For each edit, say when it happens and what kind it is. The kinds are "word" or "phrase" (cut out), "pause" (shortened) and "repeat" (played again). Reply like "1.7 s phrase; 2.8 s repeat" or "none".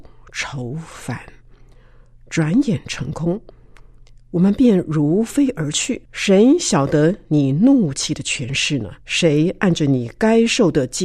6.0 s pause; 9.0 s pause